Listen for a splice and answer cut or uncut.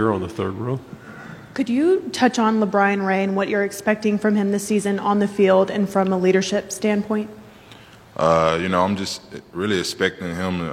uncut